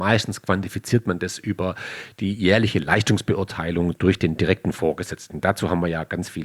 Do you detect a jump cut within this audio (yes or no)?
no